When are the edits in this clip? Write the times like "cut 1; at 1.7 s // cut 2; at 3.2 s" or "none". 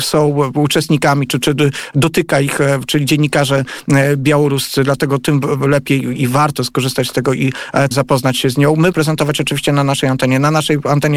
cut 1; at 7.9 s // cut 2; at 8.9 s